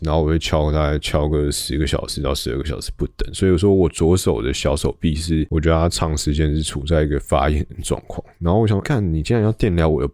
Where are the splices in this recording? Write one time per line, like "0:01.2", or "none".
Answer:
0:08.8